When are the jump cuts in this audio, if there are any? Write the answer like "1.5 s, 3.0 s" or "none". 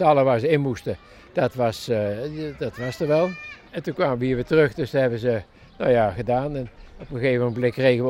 3.7 s

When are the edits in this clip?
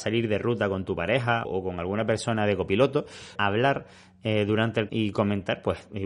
1.4 s, 3.4 s, 4.9 s

